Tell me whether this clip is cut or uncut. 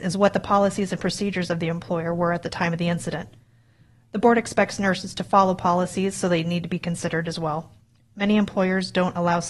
uncut